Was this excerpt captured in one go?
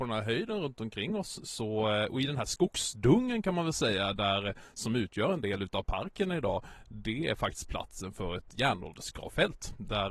yes; 0 cuts

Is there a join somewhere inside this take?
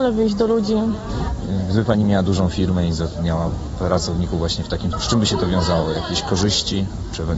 yes; 1 cut; at 4.9 s

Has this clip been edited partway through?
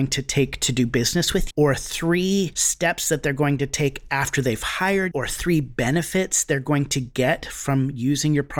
yes; 2 cuts; at 1.5 s, 5.1 s

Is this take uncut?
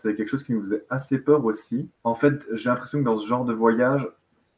no; 1 cut; at 2.0 s

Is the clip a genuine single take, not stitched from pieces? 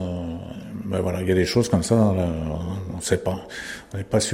yes; 0 cuts

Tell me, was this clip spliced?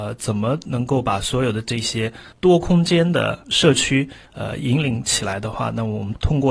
no; 0 cuts

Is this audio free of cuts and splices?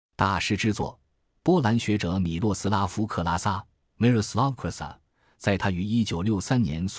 yes; 0 cuts

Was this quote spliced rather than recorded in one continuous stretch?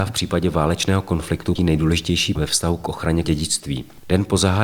yes; 3 cuts; at 1.6 s, 2.4 s, 3.2 s

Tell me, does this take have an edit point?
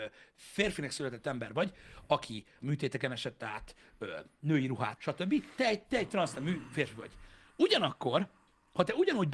yes; 2 cuts; at 2.6 s, 5.0 s

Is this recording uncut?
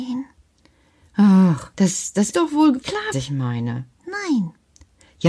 no; 5 cuts; at 1.7 s, 2.3 s, 2.8 s, 3.1 s, 3.9 s

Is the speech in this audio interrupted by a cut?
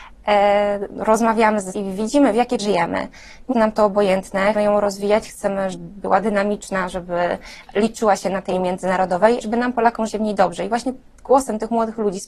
yes; 8 cuts; at 1.7 s, 2.6 s, 3.5 s, 4.5 s, 5.7 s, 8.5 s, 9.4 s, 10.1 s

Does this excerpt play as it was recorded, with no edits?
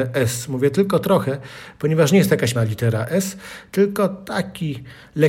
no; 1 cut; at 2.6 s

